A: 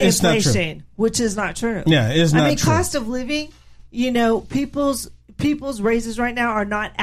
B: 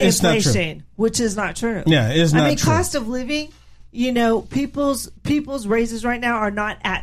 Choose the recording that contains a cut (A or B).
B